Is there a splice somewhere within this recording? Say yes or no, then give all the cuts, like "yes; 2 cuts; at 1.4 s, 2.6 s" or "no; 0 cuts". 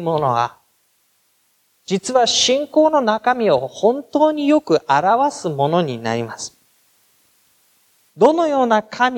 no; 0 cuts